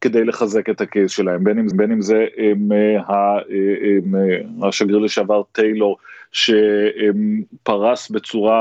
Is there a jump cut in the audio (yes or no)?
yes